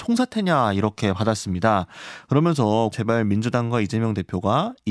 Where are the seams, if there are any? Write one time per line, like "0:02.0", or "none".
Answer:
0:02.9